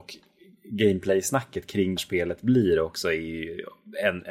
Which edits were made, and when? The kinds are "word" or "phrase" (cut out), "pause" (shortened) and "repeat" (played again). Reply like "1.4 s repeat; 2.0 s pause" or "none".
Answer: 2.0 s word